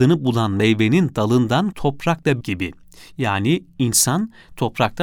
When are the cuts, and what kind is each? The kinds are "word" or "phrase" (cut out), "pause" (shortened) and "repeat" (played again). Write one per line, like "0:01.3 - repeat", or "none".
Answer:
0:01.7 - word
0:02.4 - word